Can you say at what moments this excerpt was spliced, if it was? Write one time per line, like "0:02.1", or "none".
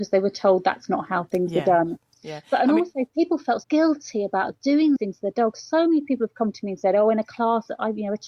0:03.6
0:05.0